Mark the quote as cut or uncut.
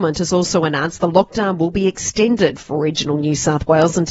uncut